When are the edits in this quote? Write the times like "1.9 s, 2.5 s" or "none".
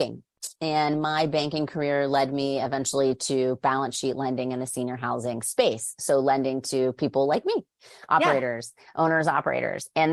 none

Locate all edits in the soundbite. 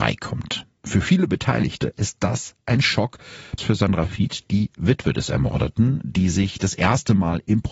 3.6 s

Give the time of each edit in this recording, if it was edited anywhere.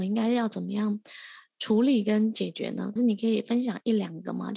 3.0 s

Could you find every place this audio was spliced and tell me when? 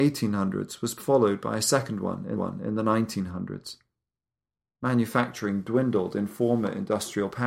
2.3 s

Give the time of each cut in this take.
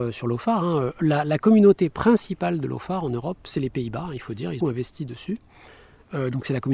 4.6 s

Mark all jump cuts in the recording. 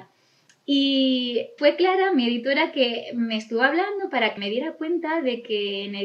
1.6 s, 4.4 s

